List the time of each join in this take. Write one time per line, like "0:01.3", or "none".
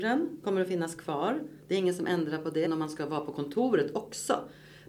0:02.7